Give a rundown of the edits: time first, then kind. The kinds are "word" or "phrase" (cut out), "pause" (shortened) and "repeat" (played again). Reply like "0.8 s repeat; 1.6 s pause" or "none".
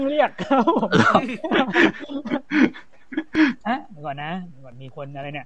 3.6 s pause